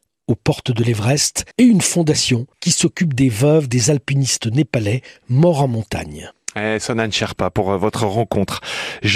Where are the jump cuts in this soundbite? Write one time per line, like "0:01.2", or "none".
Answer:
0:01.5
0:02.5